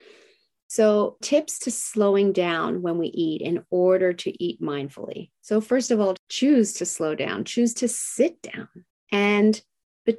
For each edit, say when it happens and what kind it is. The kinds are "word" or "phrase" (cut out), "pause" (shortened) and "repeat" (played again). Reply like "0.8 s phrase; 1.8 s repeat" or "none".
1.2 s word; 6.2 s word; 8.9 s pause